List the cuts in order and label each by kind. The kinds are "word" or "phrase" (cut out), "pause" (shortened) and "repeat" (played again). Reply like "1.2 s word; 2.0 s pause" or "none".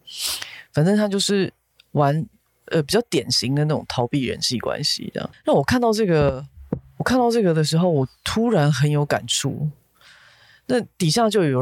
5.3 s pause